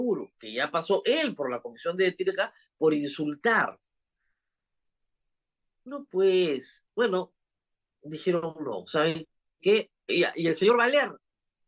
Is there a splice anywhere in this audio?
no; 0 cuts

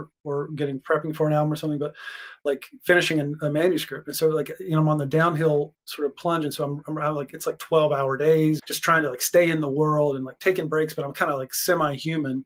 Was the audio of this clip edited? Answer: yes; 1 cut; at 8.6 s

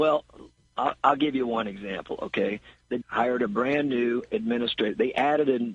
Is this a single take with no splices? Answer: no; 1 cut; at 3.0 s

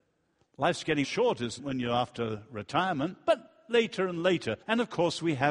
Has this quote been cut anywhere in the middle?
yes; 3 cuts; at 1.0 s, 1.6 s, 4.6 s

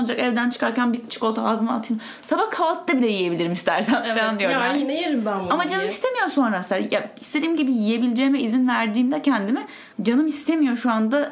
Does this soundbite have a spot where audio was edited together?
yes; 1 cut; at 9.9 s

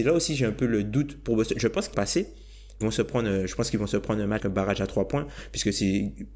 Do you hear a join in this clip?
yes; 3 cuts; at 1.9 s, 2.8 s, 4.4 s

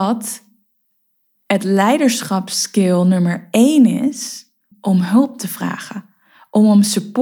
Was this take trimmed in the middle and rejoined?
yes; 1 cut; at 4.7 s

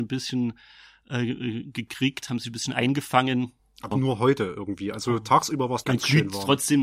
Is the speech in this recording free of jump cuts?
no; 2 cuts; at 3.9 s, 5.8 s

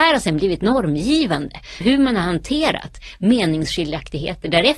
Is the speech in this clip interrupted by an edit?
yes; 1 cut; at 1.8 s

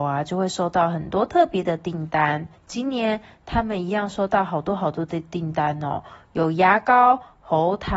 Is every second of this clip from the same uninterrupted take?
no; 1 cut; at 2.5 s

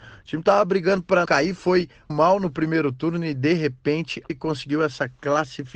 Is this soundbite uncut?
no; 3 cuts; at 1.2 s, 2.1 s, 4.3 s

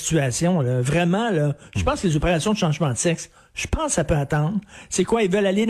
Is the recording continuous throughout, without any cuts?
yes; 0 cuts

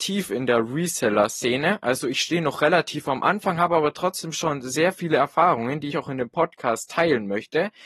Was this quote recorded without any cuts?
no; 1 cut; at 5.9 s

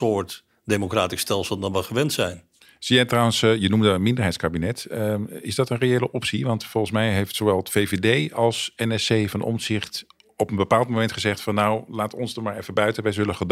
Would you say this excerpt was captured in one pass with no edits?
yes; 0 cuts

